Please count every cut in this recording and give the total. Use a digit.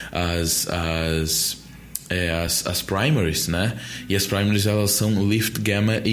0